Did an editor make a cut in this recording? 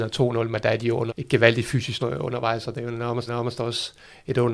yes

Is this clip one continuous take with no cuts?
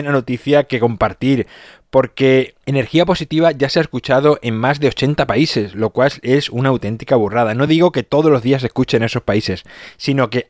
yes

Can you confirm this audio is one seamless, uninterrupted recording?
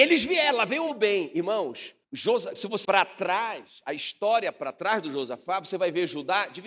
no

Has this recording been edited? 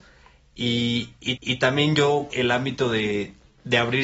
yes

